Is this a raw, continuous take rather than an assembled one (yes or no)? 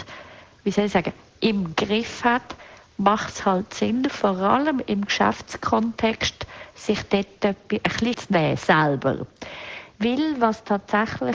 no